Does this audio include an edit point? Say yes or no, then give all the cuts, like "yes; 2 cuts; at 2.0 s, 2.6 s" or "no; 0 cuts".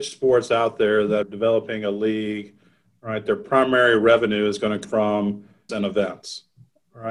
yes; 3 cuts; at 1.2 s, 4.8 s, 5.7 s